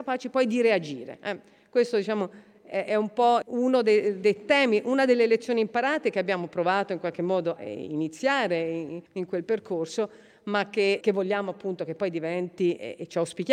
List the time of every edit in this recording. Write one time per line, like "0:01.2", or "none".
0:02.9
0:03.4
0:04.2
0:07.6
0:09.1
0:11.0